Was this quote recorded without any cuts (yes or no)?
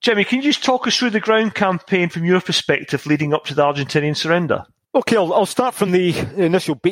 yes